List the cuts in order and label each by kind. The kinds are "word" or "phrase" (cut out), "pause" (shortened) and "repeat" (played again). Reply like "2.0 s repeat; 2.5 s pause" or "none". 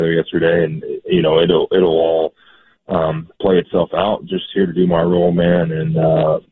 none